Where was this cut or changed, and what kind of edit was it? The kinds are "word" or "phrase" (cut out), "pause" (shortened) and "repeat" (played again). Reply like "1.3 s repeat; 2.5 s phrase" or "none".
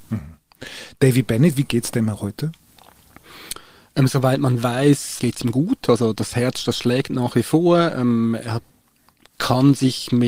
none